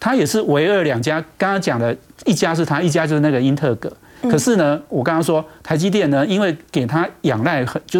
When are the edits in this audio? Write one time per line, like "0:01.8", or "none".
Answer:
0:01.3